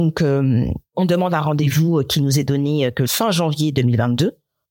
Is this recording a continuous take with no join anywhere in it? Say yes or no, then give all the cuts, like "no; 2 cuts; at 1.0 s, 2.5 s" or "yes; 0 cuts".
yes; 0 cuts